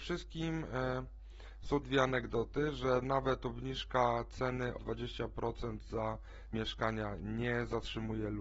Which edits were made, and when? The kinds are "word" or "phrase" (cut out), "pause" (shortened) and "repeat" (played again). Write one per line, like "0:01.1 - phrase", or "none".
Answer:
0:01.8 - word
0:04.8 - word
0:06.5 - word